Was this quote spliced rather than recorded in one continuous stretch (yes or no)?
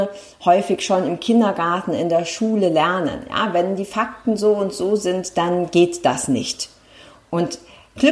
no